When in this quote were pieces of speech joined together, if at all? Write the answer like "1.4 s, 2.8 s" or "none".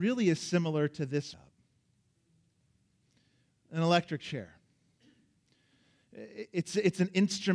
1.3 s